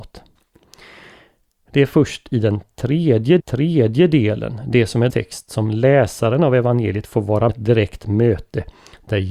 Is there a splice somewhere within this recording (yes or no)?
yes